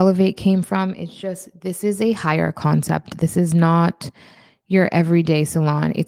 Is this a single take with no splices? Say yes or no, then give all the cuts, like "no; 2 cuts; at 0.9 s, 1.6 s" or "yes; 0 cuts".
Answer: yes; 0 cuts